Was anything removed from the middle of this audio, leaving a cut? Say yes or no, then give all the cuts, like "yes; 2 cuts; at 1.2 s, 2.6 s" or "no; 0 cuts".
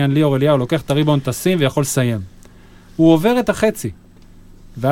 no; 0 cuts